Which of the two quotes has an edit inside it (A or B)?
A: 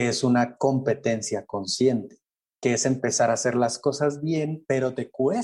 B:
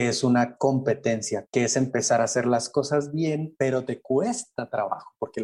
B